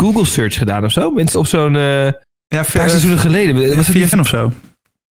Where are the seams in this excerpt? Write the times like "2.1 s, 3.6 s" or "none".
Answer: 1.3 s, 2.2 s, 4.1 s